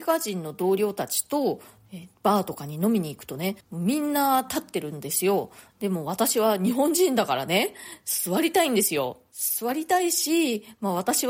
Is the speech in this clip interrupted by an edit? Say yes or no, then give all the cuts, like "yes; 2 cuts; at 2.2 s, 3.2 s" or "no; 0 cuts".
yes; 1 cut; at 3.6 s